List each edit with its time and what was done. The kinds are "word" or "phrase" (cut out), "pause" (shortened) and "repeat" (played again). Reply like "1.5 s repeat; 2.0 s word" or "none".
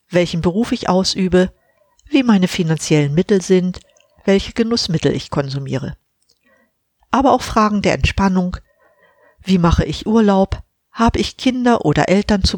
none